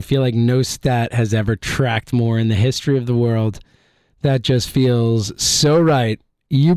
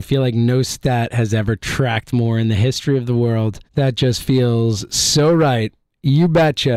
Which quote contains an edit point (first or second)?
second